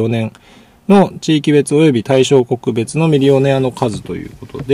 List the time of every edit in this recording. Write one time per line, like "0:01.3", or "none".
none